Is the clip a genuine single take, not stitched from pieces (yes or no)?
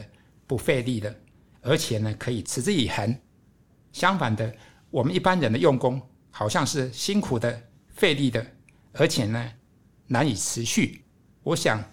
yes